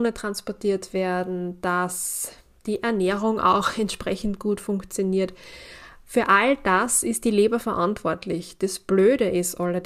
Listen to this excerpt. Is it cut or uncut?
uncut